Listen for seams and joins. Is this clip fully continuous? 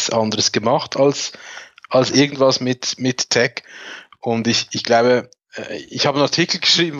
yes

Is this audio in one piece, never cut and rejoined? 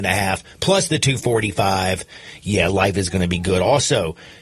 yes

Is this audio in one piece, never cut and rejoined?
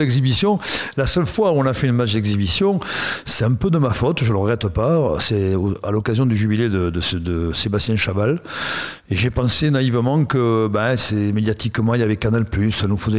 yes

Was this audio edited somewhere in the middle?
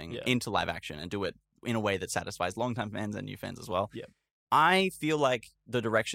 no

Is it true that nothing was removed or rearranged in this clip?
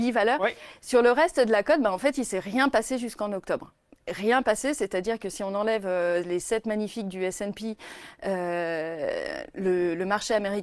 yes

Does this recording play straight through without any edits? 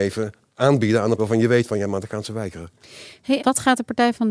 no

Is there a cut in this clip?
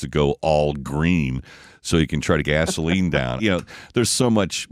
yes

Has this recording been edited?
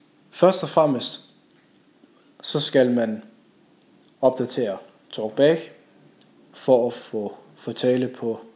no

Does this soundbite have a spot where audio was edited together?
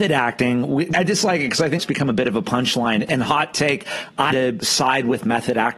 yes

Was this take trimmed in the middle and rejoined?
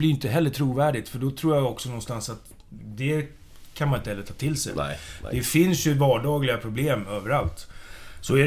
no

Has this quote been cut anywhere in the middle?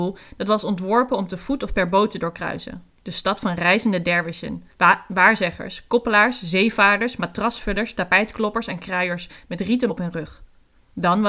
yes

